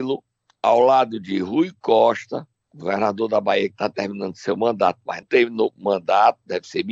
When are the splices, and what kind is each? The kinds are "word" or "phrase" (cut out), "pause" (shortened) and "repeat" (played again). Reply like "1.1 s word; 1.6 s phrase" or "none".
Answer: 5.2 s word